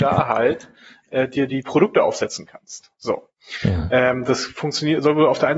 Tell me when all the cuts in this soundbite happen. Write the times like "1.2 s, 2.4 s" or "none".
none